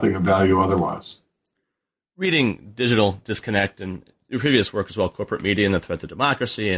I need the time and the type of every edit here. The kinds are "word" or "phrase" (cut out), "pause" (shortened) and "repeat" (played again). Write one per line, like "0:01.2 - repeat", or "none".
none